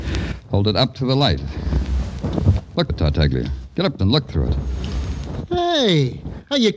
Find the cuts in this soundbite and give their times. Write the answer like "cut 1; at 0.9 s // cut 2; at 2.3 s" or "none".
cut 1; at 2.9 s // cut 2; at 4.0 s